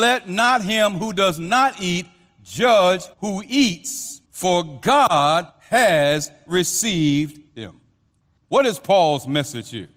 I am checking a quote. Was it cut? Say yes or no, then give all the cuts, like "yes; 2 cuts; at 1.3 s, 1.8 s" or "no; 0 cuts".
yes; 4 cuts; at 3.1 s, 4.2 s, 5.5 s, 7.5 s